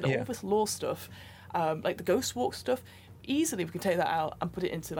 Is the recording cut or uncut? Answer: uncut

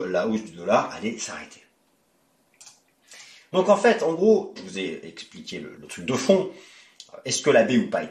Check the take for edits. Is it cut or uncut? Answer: cut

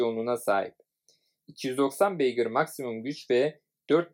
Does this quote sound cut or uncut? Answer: uncut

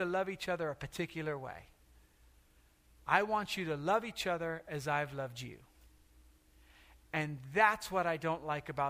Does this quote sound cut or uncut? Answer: uncut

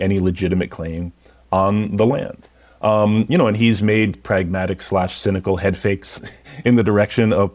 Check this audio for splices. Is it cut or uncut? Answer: cut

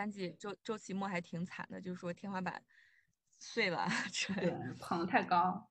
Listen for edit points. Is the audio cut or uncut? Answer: uncut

